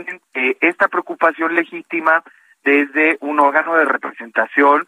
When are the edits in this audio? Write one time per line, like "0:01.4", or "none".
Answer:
none